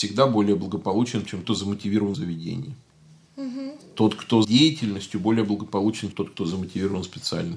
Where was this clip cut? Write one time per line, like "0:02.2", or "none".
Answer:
0:01.4
0:02.1
0:04.4
0:06.1